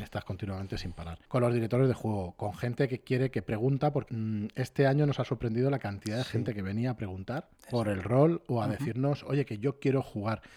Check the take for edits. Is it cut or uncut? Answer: cut